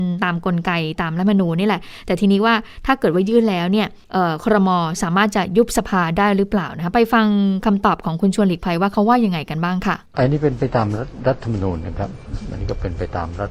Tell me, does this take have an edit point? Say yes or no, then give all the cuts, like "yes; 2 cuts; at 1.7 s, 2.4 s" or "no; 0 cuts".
yes; 2 cuts; at 4.0 s, 10.1 s